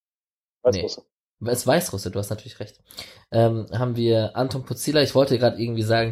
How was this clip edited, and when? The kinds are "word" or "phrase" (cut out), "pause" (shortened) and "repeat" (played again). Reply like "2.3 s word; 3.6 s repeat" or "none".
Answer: none